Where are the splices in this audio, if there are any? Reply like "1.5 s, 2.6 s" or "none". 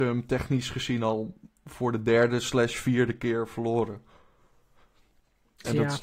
none